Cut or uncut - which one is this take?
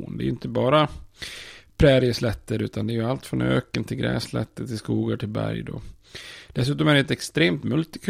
uncut